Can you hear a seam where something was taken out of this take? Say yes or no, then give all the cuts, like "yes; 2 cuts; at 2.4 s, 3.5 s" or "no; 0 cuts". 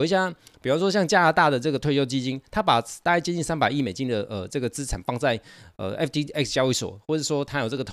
no; 0 cuts